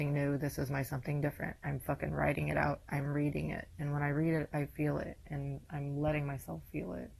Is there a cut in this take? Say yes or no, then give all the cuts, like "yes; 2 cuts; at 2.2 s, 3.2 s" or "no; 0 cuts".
no; 0 cuts